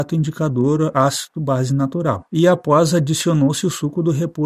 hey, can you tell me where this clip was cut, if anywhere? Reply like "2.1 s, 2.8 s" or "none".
2.3 s